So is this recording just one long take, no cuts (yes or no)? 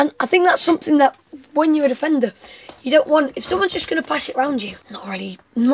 no